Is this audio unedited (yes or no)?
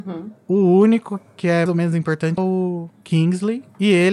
no